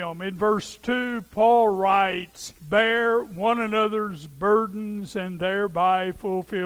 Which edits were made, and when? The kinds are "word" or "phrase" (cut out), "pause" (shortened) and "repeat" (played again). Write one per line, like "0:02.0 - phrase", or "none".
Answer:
0:02.6 - pause

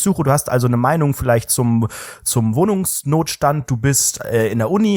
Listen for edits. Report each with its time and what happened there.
none

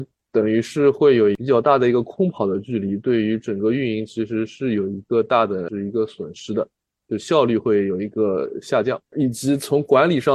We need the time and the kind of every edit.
none

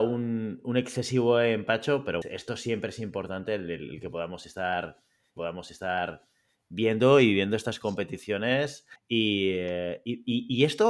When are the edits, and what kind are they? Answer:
0:02.2 - word
0:05.4 - repeat
0:09.0 - pause

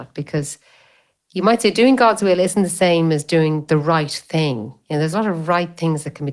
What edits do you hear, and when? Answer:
none

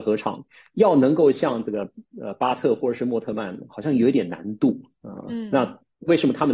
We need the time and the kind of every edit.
0:02.1 - pause
0:03.7 - word

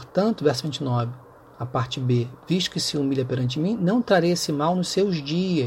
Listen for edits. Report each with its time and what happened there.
none

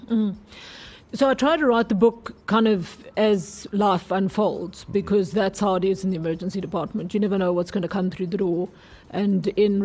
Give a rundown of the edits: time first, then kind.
0:01.0 - pause

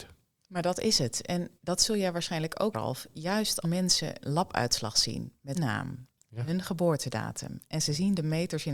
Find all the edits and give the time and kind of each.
0:01.6 - pause
0:02.7 - word
0:03.6 - word
0:04.2 - word
0:05.5 - word

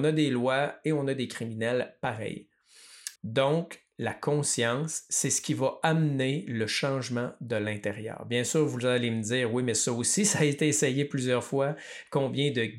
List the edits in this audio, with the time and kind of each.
0:03.2 - pause

